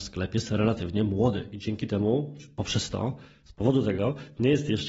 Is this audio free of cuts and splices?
yes; 0 cuts

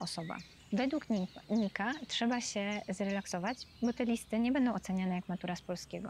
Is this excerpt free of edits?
yes; 0 cuts

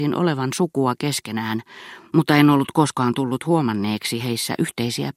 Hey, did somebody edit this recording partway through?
no; 0 cuts

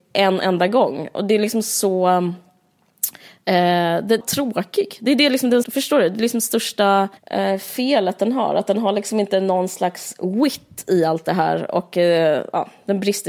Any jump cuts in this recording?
yes; 3 cuts; at 4.2 s, 5.6 s, 7.2 s

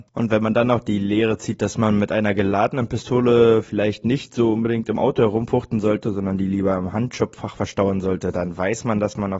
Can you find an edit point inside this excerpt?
no; 0 cuts

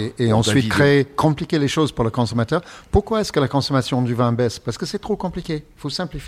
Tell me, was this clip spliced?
no; 0 cuts

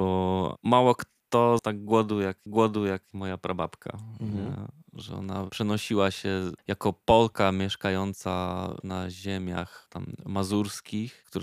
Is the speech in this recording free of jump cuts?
no; 3 cuts; at 1.6 s, 2.5 s, 6.6 s

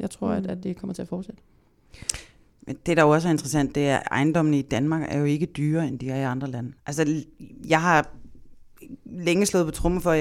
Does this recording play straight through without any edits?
no; 1 cut; at 6.8 s

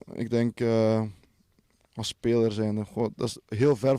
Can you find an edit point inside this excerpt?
no; 0 cuts

